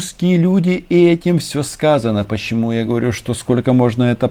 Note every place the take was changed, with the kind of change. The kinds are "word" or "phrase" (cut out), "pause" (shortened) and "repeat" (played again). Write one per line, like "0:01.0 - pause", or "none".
none